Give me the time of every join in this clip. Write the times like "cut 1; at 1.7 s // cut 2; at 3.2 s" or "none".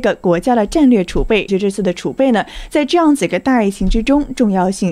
cut 1; at 1.5 s